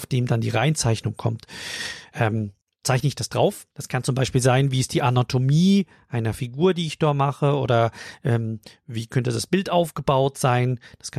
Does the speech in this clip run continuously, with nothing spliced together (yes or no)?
no